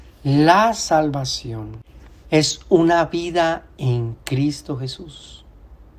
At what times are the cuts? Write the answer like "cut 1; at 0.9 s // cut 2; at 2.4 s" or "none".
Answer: none